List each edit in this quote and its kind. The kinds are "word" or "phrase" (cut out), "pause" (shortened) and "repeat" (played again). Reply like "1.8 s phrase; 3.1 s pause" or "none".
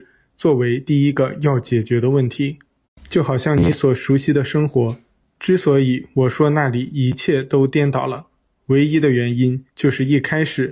2.8 s pause; 9.7 s pause